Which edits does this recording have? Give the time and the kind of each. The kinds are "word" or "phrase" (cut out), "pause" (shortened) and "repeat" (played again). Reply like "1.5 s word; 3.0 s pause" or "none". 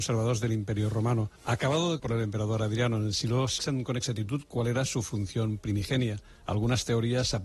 1.4 s pause; 2.0 s word; 3.6 s phrase